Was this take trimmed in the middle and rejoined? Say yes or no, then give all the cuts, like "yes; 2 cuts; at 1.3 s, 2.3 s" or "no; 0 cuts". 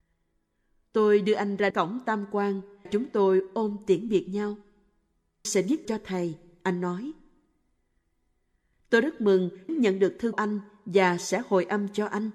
yes; 6 cuts; at 1.7 s, 2.9 s, 5.4 s, 5.8 s, 9.7 s, 10.3 s